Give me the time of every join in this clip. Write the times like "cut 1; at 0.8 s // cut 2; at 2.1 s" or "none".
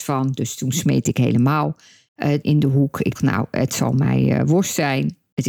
cut 1; at 2.4 s // cut 2; at 3.2 s